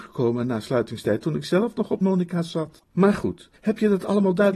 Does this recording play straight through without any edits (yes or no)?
no